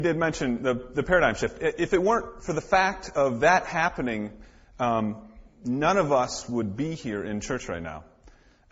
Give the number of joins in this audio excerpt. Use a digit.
0